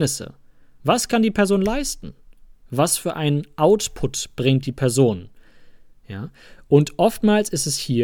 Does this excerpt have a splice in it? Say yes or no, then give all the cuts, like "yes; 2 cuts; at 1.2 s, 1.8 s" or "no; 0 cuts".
no; 0 cuts